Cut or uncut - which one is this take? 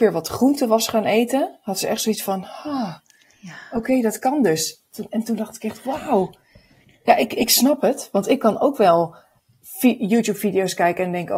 uncut